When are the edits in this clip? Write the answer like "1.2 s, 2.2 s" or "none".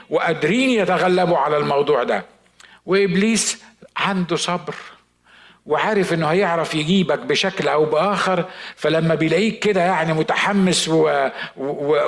none